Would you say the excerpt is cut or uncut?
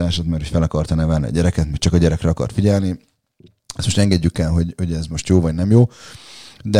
uncut